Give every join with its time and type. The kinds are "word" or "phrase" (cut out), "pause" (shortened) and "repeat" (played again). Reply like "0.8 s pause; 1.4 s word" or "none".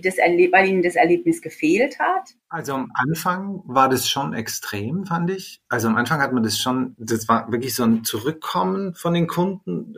2.4 s pause